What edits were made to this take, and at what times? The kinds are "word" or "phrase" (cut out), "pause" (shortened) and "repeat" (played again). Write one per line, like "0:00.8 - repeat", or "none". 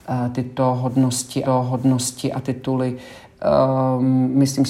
0:01.4 - repeat